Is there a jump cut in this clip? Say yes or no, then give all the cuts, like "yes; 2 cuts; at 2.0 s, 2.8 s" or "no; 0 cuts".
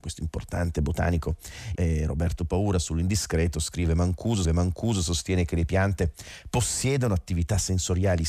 yes; 2 cuts; at 1.8 s, 4.4 s